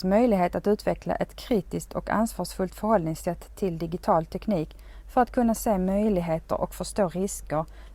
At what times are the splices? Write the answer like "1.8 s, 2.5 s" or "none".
none